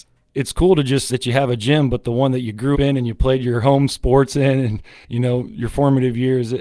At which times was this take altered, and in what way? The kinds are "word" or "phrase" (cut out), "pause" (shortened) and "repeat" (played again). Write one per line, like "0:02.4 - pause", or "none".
0:01.1 - word
0:02.7 - word
0:05.0 - pause